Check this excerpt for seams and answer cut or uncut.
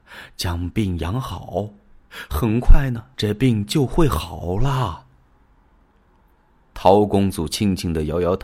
cut